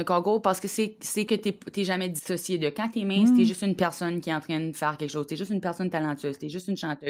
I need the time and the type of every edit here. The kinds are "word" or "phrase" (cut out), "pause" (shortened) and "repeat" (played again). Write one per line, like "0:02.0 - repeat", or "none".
0:01.3 - phrase